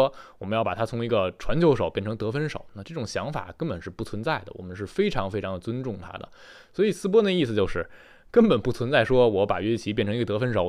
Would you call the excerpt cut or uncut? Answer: uncut